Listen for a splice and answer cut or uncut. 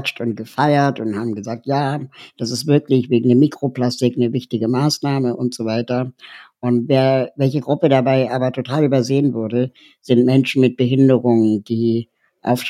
uncut